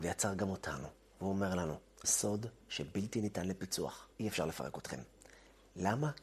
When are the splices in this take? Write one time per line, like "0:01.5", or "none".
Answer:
0:02.0
0:02.6
0:04.1